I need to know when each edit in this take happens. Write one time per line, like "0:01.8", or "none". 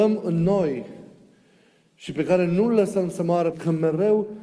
0:03.5